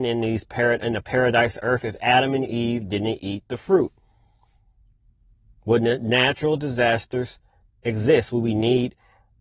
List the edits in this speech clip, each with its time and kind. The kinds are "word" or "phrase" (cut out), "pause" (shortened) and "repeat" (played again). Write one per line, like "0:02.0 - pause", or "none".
none

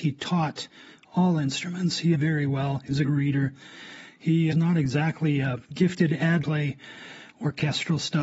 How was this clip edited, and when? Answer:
0:02.1 - phrase
0:03.0 - word
0:04.5 - phrase
0:05.6 - pause
0:06.4 - phrase

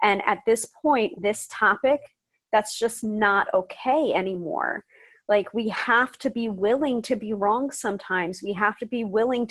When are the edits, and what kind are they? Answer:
0:01.1 - word

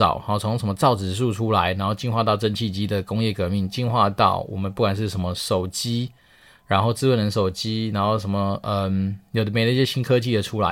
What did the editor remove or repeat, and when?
none

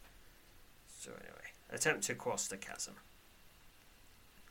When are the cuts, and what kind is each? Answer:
0:01.6 - pause

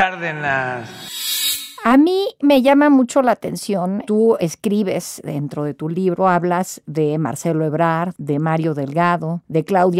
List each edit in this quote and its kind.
none

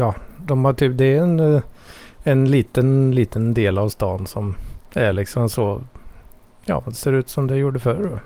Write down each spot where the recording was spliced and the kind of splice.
0:04.9 - pause

